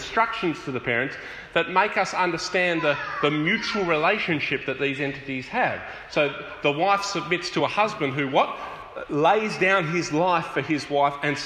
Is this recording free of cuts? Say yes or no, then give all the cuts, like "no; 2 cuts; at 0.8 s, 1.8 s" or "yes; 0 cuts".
yes; 0 cuts